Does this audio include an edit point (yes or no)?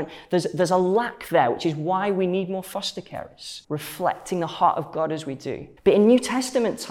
yes